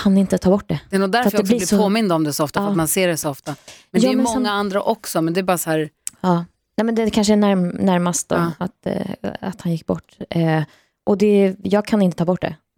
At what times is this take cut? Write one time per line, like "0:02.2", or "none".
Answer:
none